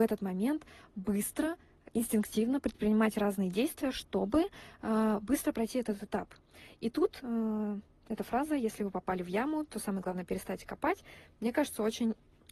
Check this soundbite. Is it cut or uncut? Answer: uncut